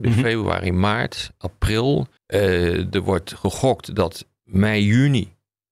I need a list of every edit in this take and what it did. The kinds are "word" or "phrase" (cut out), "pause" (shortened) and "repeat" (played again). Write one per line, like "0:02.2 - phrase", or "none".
0:02.2 - pause